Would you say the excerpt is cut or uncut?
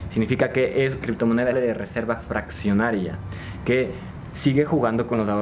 cut